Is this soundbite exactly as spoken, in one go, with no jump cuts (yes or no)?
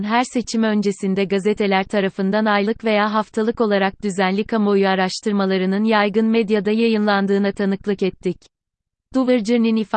yes